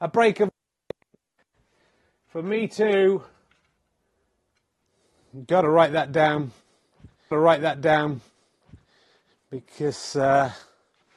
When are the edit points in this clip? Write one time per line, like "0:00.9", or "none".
0:07.3